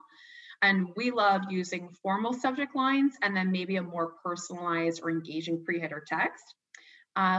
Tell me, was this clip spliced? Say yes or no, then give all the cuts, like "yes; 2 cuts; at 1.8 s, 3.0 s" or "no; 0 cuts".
no; 0 cuts